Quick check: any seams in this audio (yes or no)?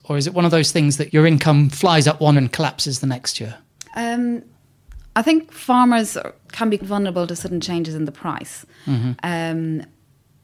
yes